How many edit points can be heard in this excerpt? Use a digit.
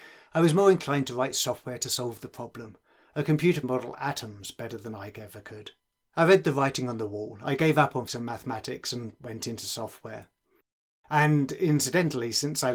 3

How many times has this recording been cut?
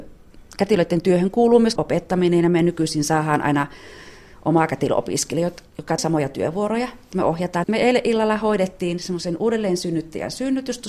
3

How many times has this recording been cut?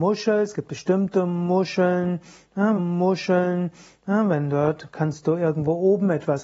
1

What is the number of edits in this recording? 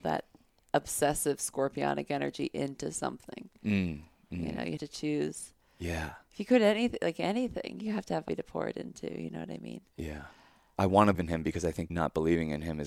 4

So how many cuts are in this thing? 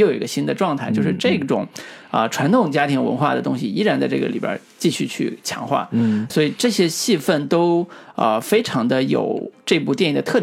1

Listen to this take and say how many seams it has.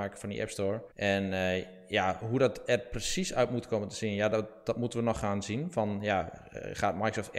1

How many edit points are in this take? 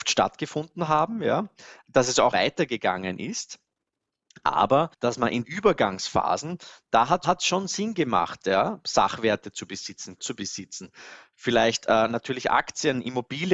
5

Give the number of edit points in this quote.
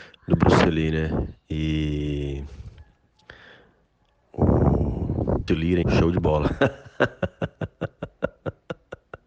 2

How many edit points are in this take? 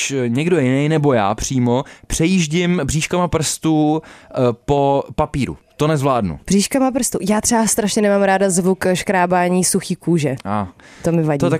0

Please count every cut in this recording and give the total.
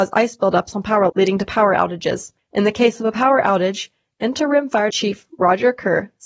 3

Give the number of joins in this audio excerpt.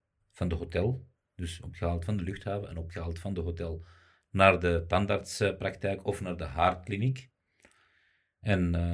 0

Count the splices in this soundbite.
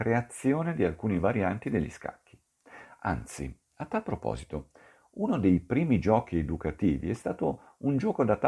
0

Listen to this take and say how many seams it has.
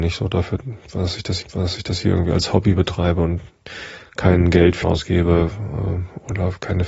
2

